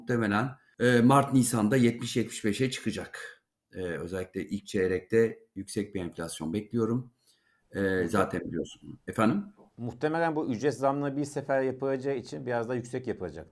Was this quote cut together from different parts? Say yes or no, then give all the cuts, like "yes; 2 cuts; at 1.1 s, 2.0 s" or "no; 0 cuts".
no; 0 cuts